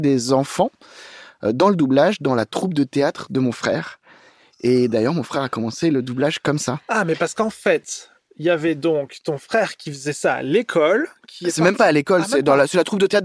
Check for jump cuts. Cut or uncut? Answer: uncut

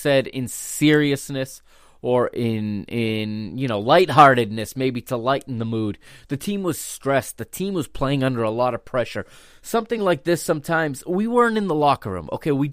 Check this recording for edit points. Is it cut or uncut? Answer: uncut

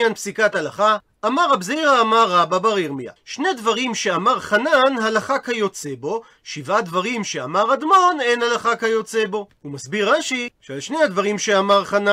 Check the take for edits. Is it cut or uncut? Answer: cut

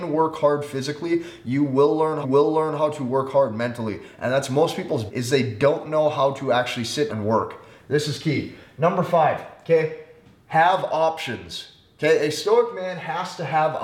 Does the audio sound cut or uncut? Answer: cut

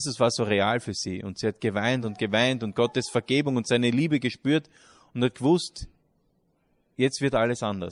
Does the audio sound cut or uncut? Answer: uncut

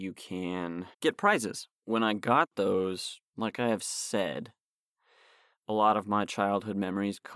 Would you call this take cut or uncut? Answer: cut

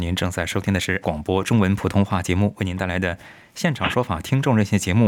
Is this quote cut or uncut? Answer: cut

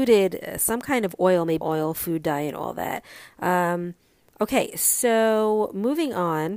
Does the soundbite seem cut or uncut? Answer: cut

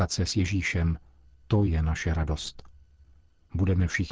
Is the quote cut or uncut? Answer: uncut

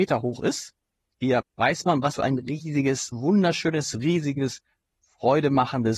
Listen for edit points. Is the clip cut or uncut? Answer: cut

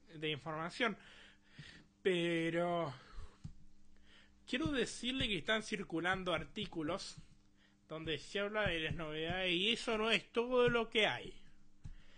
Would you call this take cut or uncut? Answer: cut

